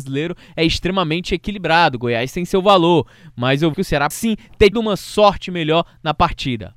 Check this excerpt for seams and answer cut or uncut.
cut